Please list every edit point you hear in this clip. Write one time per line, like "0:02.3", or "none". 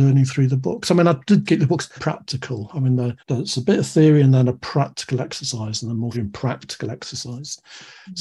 0:01.5
0:02.0
0:03.2
0:06.1